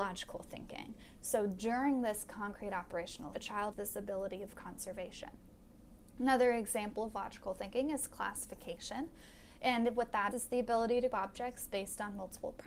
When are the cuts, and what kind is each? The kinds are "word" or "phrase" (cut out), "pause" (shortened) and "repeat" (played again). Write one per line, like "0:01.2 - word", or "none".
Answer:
0:03.3 - word
0:03.7 - word
0:10.3 - word
0:11.1 - word